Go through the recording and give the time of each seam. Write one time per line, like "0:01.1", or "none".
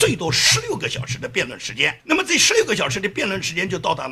0:02.0